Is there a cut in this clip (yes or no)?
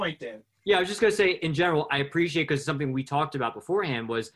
no